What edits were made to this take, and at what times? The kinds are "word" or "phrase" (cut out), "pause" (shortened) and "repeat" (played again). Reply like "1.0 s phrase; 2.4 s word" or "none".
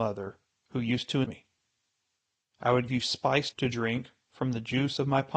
1.2 s word; 2.9 s word; 3.5 s word